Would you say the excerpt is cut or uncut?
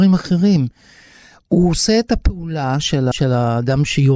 cut